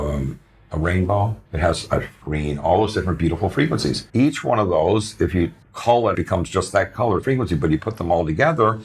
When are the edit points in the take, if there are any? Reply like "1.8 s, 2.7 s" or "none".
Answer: 1.5 s, 2.2 s, 4.1 s, 5.6 s, 6.1 s, 7.2 s